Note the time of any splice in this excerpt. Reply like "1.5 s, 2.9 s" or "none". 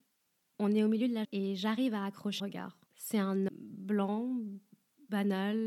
1.2 s, 2.4 s, 2.9 s, 3.5 s

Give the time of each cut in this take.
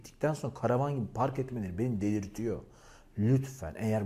none

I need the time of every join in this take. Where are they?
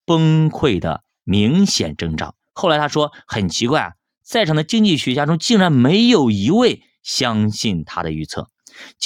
2.4 s

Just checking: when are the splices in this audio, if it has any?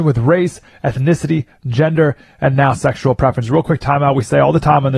none

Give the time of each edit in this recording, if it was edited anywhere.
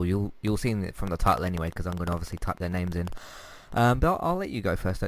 none

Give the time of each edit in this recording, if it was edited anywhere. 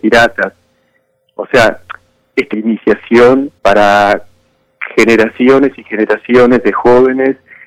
2.5 s, 3.6 s

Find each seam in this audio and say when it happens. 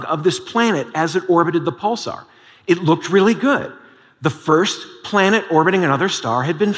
none

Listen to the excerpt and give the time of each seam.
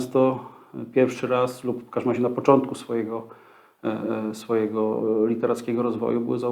none

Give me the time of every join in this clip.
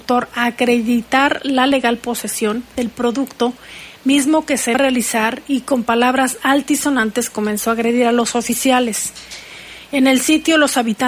2.7 s, 4.7 s

